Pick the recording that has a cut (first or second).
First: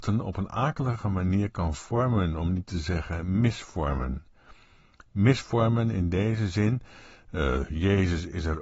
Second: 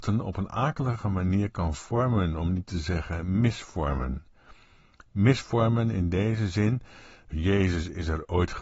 second